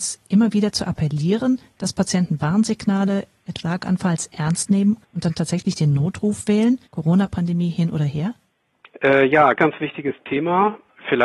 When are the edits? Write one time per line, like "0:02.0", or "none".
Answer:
0:03.6
0:05.0
0:06.9
0:08.7
0:09.6